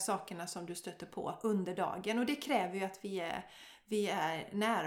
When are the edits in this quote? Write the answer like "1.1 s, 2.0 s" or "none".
none